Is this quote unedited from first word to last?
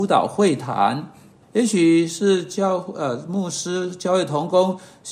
no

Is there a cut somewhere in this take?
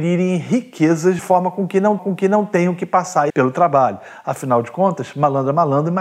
yes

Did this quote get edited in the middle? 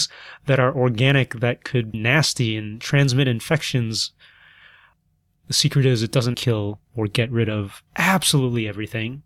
yes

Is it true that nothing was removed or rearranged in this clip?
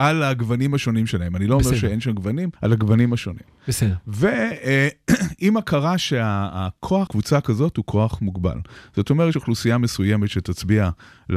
no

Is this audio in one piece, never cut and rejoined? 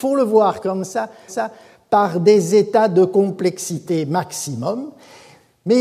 no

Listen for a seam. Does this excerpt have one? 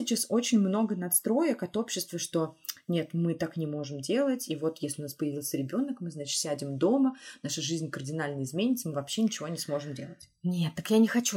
no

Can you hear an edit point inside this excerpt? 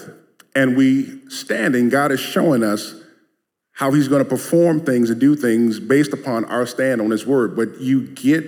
no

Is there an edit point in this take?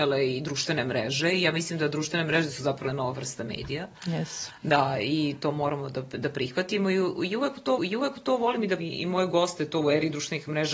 yes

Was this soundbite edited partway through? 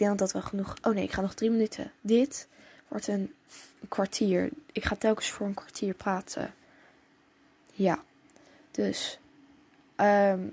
no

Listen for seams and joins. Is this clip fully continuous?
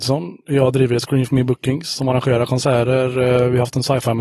yes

